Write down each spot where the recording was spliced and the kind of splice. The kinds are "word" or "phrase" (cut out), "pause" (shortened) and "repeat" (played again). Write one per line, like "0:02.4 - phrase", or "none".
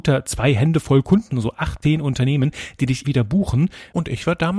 0:01.3 - word
0:01.8 - word
0:03.0 - word